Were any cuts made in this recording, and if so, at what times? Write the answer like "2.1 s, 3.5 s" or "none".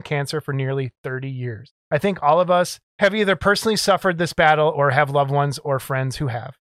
1.8 s, 2.9 s